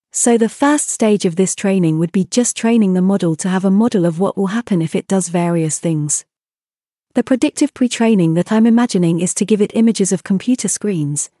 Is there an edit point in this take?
no; 0 cuts

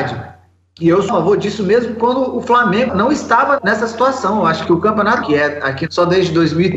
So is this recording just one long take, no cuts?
no; 6 cuts; at 1.1 s, 2.9 s, 3.6 s, 4.6 s, 5.2 s, 5.9 s

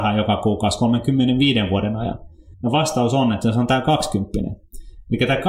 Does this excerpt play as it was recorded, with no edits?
no; 1 cut; at 2.5 s

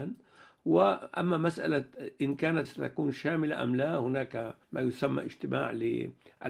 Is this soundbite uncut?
no; 2 cuts; at 2.6 s, 4.6 s

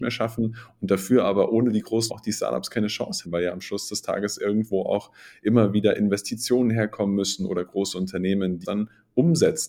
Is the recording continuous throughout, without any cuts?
no; 3 cuts; at 2.1 s, 3.2 s, 8.6 s

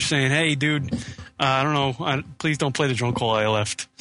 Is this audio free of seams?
yes; 0 cuts

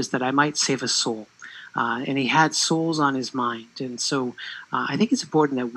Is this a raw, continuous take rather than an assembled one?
yes; 0 cuts

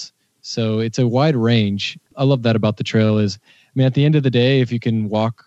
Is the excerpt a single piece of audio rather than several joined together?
yes; 0 cuts

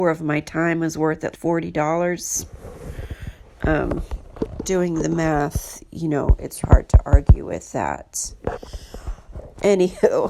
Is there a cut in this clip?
yes; 3 cuts; at 1.3 s, 4.6 s, 6.6 s

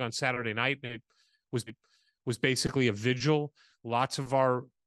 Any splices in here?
yes; 1 cut; at 1.7 s

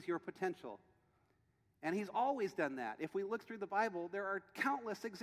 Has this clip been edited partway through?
no; 0 cuts

